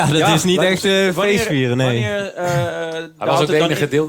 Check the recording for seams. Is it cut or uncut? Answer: uncut